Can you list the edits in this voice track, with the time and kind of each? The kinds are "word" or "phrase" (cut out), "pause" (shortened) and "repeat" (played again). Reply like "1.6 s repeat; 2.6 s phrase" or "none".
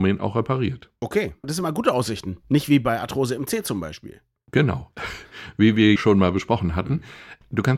6.0 s word